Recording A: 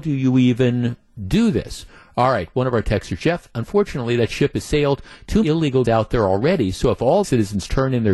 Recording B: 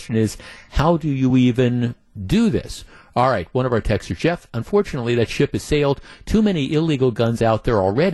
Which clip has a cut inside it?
A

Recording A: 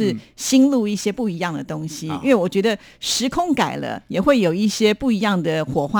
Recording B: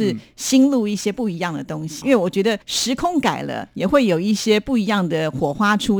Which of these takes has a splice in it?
B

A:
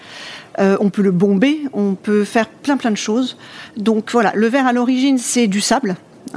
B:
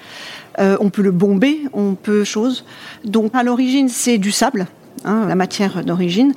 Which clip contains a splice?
B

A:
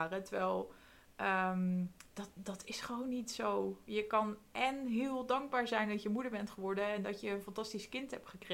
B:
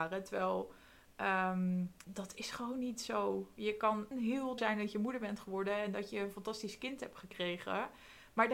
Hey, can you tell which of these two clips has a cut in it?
B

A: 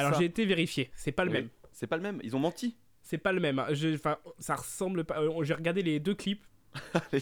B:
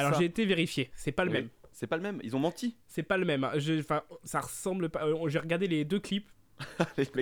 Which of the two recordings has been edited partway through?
B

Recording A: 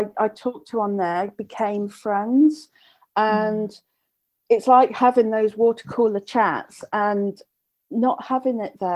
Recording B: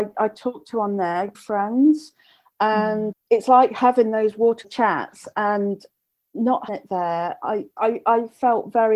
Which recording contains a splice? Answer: B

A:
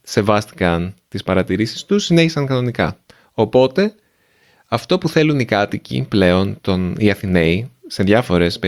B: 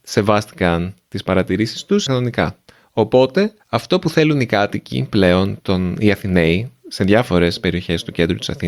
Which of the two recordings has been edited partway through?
B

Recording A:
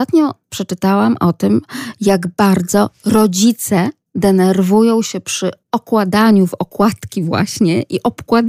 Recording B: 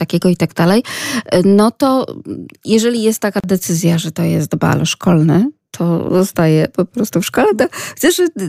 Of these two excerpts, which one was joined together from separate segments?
A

